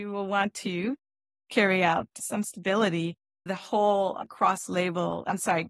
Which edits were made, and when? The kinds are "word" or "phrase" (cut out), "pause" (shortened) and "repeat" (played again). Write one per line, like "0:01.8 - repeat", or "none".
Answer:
0:03.5 - word